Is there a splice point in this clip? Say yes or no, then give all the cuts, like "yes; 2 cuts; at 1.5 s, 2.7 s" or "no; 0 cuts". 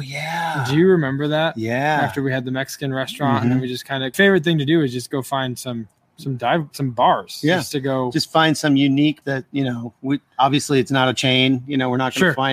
yes; 3 cuts; at 4.1 s, 6.7 s, 9.2 s